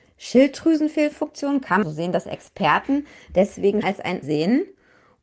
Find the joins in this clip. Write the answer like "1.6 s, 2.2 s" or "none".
1.8 s, 3.8 s, 4.2 s